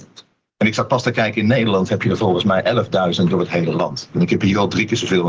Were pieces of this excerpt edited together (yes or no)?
no